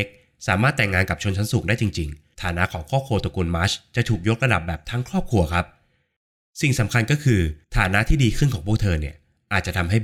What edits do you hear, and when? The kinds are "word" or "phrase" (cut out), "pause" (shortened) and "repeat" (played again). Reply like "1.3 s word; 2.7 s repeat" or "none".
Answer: 2.3 s word; 7.6 s pause